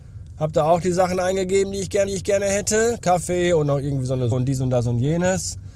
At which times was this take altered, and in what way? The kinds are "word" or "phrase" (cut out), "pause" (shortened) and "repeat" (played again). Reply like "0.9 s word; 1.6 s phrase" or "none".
2.1 s repeat; 4.3 s word